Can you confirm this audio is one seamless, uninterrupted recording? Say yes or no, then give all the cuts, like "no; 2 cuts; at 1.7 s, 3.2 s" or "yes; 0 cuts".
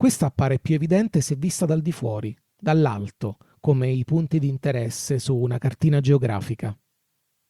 yes; 0 cuts